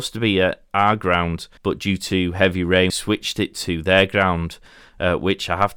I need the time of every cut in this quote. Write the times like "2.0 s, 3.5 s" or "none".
1.6 s, 2.9 s